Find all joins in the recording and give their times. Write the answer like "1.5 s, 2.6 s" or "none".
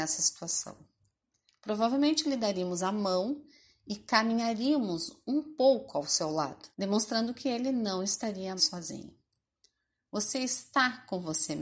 6.7 s, 8.6 s